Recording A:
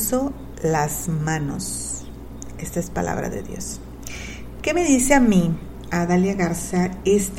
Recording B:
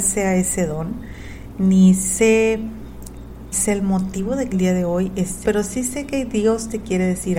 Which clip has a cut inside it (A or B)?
B